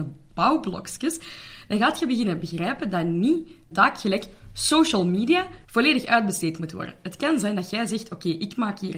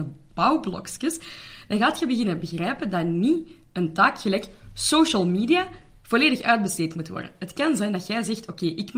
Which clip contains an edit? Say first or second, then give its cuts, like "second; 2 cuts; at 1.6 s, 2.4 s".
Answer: first; 2 cuts; at 3.7 s, 5.6 s